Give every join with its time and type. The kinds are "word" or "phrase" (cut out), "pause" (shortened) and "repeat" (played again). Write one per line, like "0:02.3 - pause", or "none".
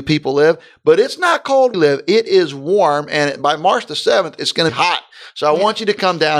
0:01.7 - phrase
0:04.7 - phrase